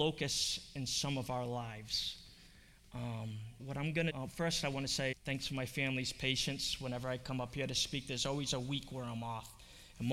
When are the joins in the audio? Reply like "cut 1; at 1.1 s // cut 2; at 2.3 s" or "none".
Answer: cut 1; at 3.6 s // cut 2; at 4.1 s // cut 3; at 5.1 s